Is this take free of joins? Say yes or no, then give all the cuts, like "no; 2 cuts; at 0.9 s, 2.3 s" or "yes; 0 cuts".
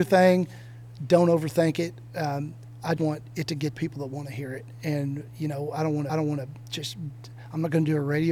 no; 3 cuts; at 3.0 s, 3.7 s, 6.1 s